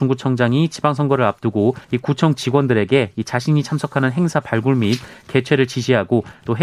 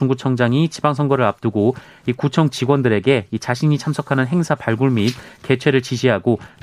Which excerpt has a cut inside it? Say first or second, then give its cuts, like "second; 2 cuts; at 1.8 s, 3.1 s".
first; 1 cut; at 1.8 s